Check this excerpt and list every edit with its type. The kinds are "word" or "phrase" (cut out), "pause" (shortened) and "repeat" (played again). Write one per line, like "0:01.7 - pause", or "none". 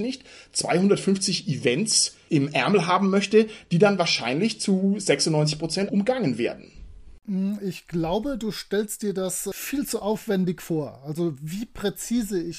0:05.9 - word

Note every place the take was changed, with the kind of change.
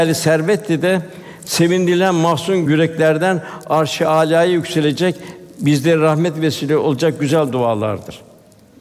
none

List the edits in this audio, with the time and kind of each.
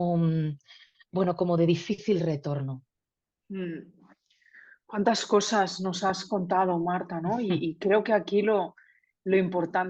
none

